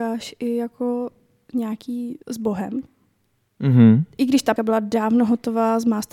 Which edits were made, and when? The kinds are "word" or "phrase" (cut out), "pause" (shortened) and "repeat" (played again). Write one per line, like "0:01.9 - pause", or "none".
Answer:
0:02.2 - pause
0:04.6 - word